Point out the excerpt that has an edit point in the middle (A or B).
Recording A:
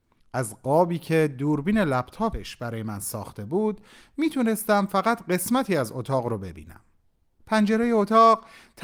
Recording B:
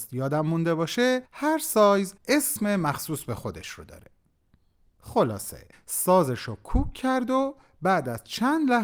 B